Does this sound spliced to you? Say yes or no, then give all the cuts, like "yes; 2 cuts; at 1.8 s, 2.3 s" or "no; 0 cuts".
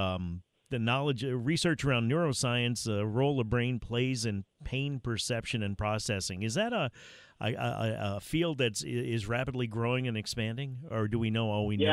no; 0 cuts